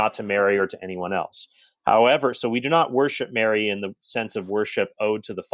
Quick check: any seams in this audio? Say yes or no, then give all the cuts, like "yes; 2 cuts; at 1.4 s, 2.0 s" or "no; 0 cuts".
no; 0 cuts